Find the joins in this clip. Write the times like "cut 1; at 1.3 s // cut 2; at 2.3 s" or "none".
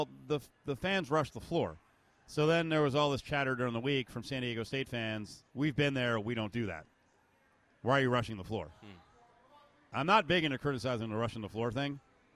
cut 1; at 5.5 s